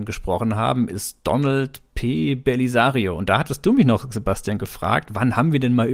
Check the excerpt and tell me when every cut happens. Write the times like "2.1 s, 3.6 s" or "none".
none

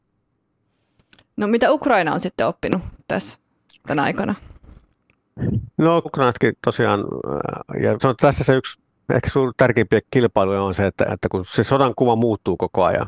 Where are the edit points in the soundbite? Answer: 6.0 s, 8.0 s, 11.1 s

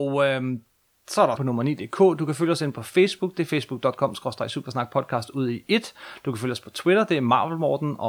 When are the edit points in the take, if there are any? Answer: 1.4 s

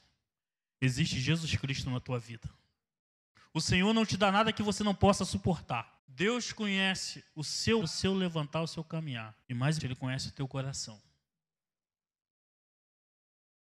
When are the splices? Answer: 3.0 s, 6.0 s, 7.8 s, 9.4 s, 9.8 s

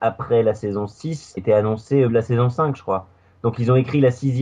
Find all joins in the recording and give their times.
1.4 s, 2.1 s

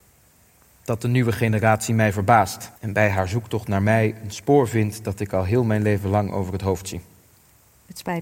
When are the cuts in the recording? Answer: 2.8 s

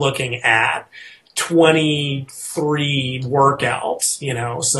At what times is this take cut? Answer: none

